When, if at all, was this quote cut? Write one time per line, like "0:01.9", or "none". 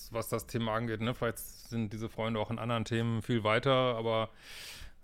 none